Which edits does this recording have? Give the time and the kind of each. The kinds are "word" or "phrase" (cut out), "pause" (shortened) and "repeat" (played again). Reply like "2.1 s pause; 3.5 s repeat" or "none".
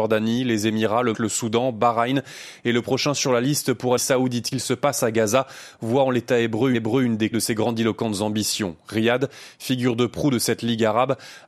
1.1 s word; 4.0 s phrase; 4.5 s phrase; 6.7 s repeat; 7.3 s word